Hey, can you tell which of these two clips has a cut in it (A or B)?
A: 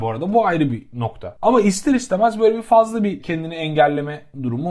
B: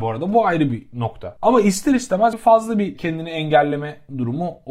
B